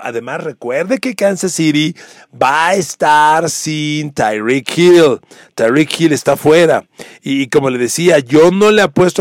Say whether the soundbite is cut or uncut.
uncut